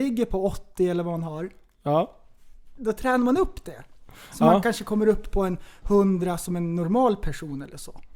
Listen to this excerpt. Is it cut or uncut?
uncut